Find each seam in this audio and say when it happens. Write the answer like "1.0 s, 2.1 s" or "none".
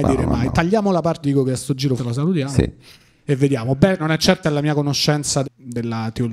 1.2 s, 2.0 s, 4.0 s, 4.4 s, 5.4 s